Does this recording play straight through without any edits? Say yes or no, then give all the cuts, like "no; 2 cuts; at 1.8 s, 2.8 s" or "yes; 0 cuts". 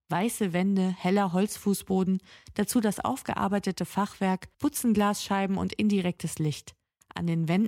no; 1 cut; at 4.5 s